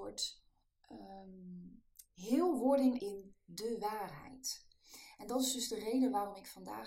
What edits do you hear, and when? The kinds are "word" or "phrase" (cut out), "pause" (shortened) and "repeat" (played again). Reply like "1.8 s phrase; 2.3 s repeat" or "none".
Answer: 3.0 s word